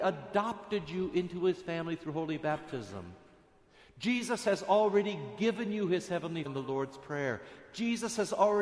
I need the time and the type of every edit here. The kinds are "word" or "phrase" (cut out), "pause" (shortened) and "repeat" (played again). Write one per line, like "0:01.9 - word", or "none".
0:06.4 - word